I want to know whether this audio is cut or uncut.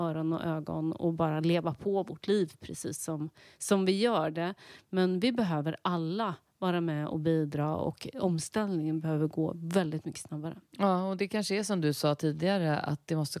uncut